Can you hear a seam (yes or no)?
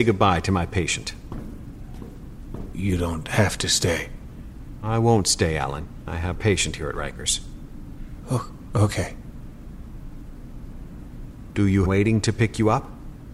yes